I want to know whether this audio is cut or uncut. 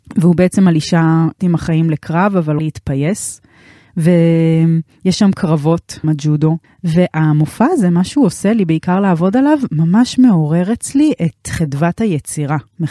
cut